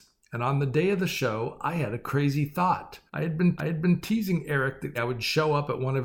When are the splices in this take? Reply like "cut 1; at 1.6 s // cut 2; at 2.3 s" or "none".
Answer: cut 1; at 3.1 s // cut 2; at 3.6 s // cut 3; at 4.9 s

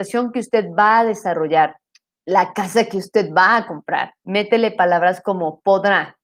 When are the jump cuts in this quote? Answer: cut 1; at 2.0 s // cut 2; at 4.2 s

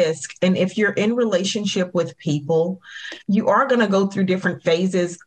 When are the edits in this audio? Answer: cut 1; at 3.2 s

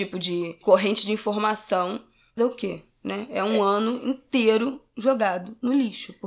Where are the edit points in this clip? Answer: cut 1; at 2.4 s

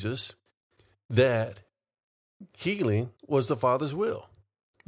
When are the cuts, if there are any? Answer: cut 1; at 3.2 s

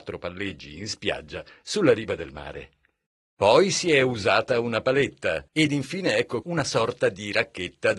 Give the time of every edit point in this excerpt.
cut 1; at 3.1 s // cut 2; at 5.5 s // cut 3; at 6.4 s

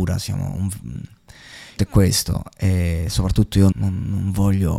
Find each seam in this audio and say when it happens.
cut 1; at 1.8 s // cut 2; at 3.7 s

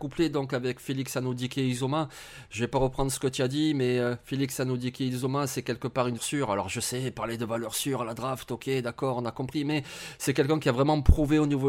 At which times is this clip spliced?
cut 1; at 6.2 s

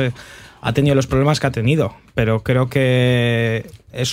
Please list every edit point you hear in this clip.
none

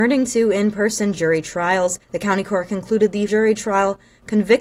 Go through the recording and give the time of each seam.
cut 1; at 2.0 s // cut 2; at 3.3 s

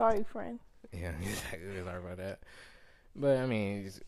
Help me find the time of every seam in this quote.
none

